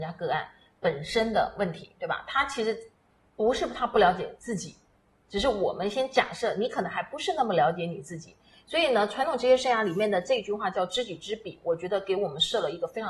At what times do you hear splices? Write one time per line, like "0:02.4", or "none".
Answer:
none